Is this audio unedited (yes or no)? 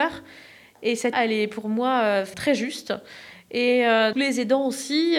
no